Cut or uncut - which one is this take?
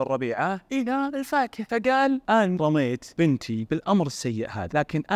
uncut